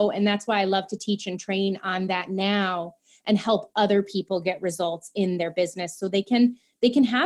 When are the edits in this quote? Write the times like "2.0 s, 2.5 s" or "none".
none